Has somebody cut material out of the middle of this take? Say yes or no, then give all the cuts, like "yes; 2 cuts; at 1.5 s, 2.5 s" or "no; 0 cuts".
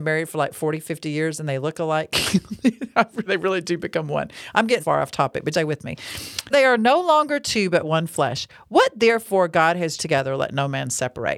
yes; 5 cuts; at 3.3 s, 4.8 s, 5.5 s, 6.5 s, 10.0 s